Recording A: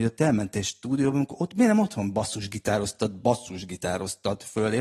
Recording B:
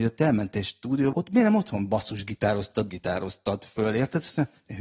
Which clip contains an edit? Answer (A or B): B